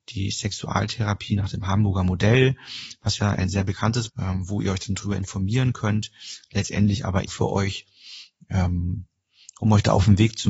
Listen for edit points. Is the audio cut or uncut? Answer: cut